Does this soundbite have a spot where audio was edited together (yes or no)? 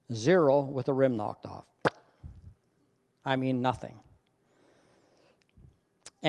no